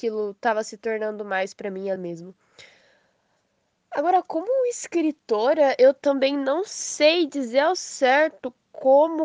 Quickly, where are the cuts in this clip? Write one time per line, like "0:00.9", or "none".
0:02.0